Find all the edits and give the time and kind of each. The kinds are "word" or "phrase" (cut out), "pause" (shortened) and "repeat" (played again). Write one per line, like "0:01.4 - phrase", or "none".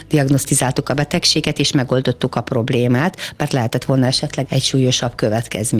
0:04.5 - word